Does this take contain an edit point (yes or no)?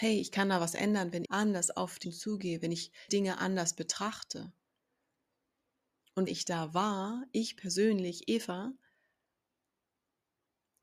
yes